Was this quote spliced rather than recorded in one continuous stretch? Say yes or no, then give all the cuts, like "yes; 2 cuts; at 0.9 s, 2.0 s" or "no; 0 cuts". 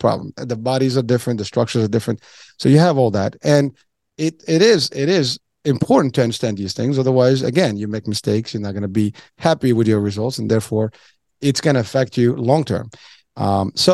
no; 0 cuts